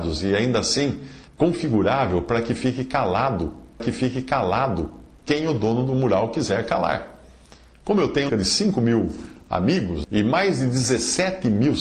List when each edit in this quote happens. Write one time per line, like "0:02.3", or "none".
0:01.3
0:03.8
0:08.3
0:10.0